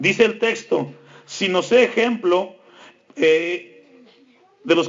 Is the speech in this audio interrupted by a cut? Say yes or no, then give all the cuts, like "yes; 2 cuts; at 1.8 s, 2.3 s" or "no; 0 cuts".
no; 0 cuts